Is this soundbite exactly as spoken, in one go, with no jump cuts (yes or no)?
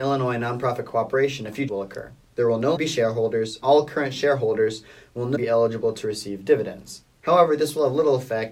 no